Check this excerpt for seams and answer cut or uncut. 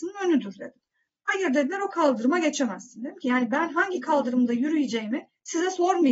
uncut